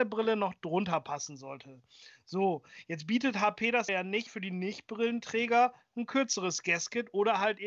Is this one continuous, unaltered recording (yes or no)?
no